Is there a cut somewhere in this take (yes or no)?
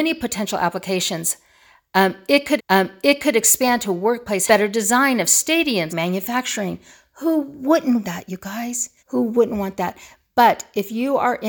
yes